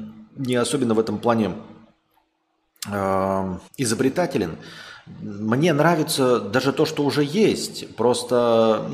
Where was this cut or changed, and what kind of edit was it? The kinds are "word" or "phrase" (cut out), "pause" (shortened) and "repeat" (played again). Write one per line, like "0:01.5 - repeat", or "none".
0:03.7 - pause